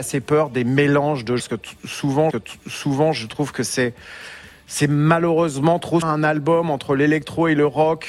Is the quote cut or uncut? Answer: cut